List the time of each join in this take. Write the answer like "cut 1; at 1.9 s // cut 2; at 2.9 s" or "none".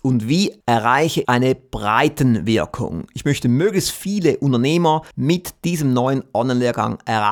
cut 1; at 1.2 s // cut 2; at 5.1 s

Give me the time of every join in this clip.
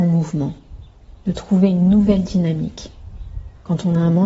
none

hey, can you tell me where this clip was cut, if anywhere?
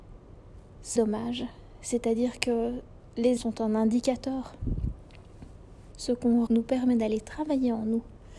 cut 1; at 1.0 s // cut 2; at 3.4 s // cut 3; at 5.9 s // cut 4; at 6.5 s

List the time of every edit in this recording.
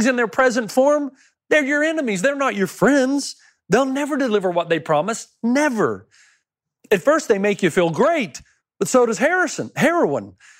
none

